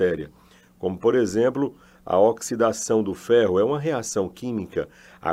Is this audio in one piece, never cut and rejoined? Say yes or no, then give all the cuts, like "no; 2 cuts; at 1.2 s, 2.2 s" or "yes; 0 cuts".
yes; 0 cuts